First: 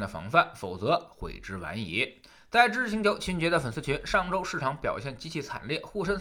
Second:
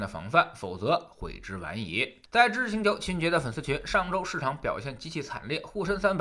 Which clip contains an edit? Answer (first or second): second